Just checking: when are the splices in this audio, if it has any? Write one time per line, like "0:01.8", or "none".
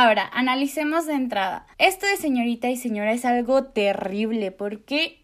0:01.7